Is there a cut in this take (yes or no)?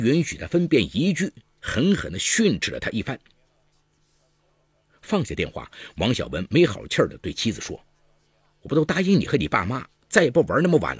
no